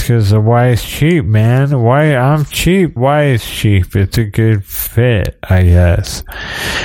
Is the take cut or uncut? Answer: cut